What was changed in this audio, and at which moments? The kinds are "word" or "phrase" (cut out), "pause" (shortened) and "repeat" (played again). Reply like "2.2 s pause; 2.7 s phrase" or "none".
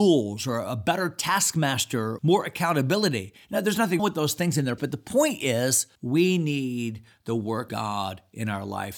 2.2 s word; 4.0 s word; 4.8 s word; 6.0 s pause; 7.7 s word